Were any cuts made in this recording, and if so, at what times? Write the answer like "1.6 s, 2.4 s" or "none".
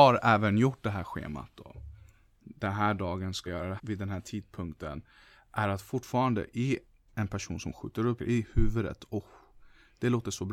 3.5 s, 3.8 s, 8.2 s

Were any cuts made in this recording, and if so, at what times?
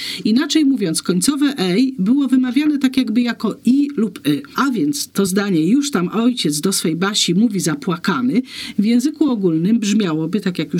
none

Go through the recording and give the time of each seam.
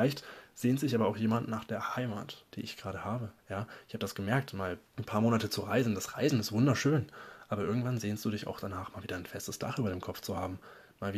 2.5 s, 3.4 s, 4.9 s

